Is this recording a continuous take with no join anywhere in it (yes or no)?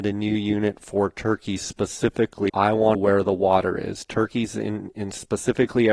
no